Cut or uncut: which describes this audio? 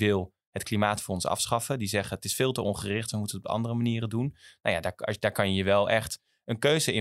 uncut